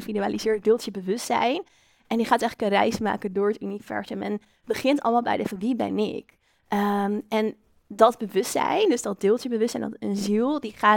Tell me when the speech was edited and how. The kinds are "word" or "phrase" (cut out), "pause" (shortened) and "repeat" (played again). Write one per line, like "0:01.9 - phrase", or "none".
0:05.5 - word

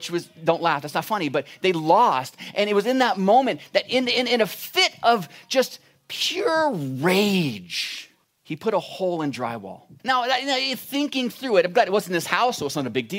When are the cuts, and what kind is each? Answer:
0:08.2 - pause
0:10.0 - pause

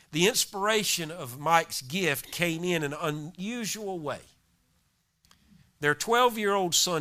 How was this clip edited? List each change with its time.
none

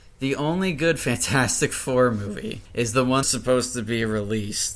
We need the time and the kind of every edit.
0:02.7 - pause
0:03.2 - phrase

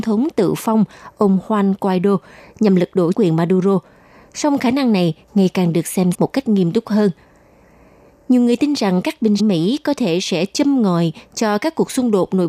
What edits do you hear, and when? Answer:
0:03.1 - word
0:06.1 - word
0:09.4 - word

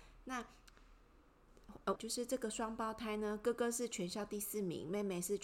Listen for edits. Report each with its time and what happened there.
0:02.0 - phrase

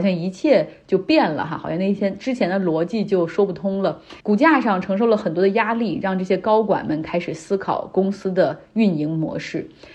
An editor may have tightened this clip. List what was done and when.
0:04.2 - pause

